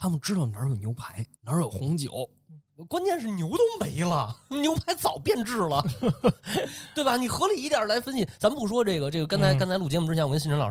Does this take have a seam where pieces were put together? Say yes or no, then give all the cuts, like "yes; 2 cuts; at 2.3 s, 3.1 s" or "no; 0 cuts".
yes; 1 cut; at 1.3 s